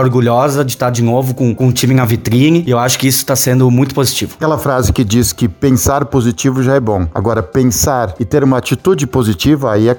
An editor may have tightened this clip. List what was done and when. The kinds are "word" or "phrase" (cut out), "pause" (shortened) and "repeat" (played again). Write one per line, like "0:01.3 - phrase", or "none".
0:04.4 - word